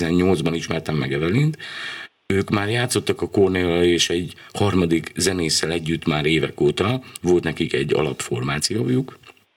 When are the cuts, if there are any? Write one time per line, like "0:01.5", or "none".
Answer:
none